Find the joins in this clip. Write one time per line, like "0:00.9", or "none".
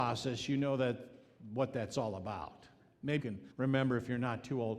0:03.2
0:03.5